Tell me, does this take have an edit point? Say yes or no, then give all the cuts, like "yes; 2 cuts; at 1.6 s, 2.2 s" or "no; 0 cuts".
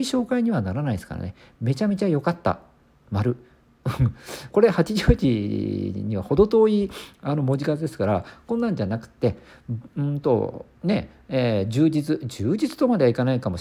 yes; 1 cut; at 4.5 s